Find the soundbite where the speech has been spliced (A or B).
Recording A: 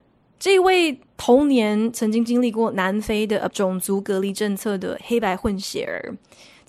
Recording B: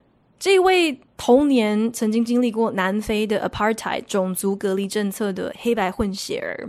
A